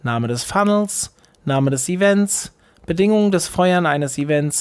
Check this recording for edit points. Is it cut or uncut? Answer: uncut